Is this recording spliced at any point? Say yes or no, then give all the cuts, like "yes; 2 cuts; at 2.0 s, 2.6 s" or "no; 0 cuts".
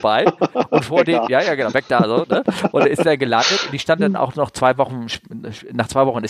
no; 0 cuts